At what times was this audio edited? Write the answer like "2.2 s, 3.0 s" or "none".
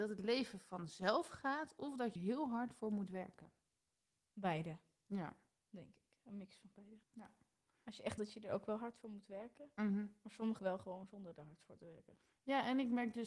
2.2 s, 7.0 s, 8.2 s, 10.6 s